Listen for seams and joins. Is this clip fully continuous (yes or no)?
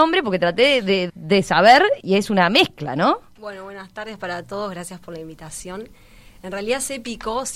no